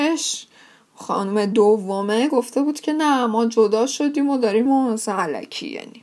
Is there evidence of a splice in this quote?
yes; 1 cut; at 4.7 s

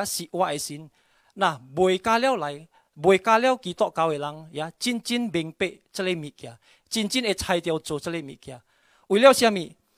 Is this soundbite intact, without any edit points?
yes; 0 cuts

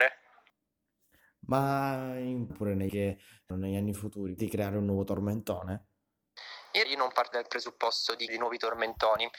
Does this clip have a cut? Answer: yes; 7 cuts; at 2.5 s, 2.9 s, 3.5 s, 4.4 s, 6.8 s, 7.3 s, 8.3 s

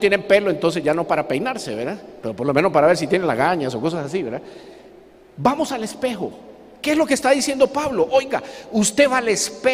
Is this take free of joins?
yes; 0 cuts

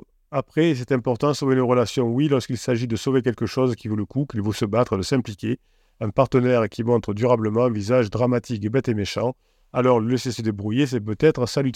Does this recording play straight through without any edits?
yes; 0 cuts

